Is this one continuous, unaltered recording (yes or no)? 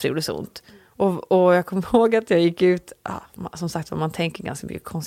yes